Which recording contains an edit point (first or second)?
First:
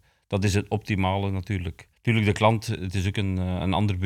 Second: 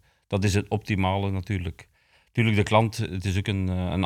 first